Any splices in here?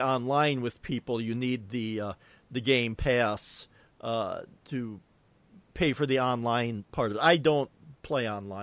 no; 0 cuts

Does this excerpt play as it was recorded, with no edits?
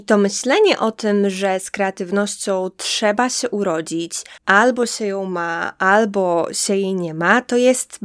no; 1 cut; at 4.4 s

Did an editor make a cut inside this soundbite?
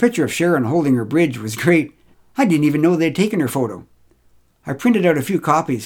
yes; 1 cut; at 2.1 s

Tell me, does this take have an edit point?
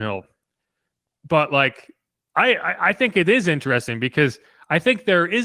no; 0 cuts

